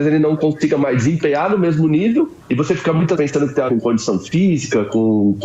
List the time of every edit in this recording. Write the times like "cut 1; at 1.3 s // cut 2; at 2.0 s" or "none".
cut 1; at 2.4 s // cut 2; at 3.1 s // cut 3; at 3.7 s